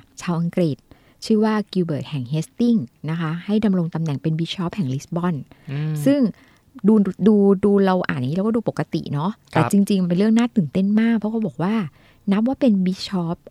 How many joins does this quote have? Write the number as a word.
zero